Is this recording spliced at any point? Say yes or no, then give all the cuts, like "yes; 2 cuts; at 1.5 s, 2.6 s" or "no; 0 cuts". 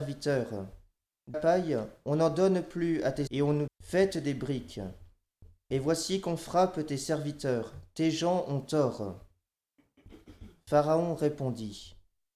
yes; 3 cuts; at 1.3 s, 3.3 s, 3.7 s